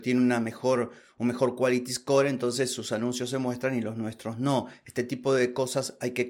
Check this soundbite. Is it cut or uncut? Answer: uncut